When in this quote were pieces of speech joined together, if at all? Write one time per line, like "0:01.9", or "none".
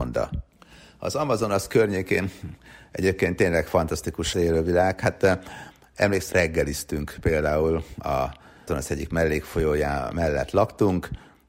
0:04.3
0:06.3
0:08.7